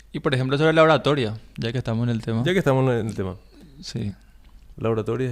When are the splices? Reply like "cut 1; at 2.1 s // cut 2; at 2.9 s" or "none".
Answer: none